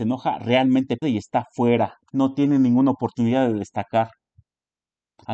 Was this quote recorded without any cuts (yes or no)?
no